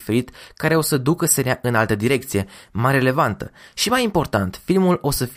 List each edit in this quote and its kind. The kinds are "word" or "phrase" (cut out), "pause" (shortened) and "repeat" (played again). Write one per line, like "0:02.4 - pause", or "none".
none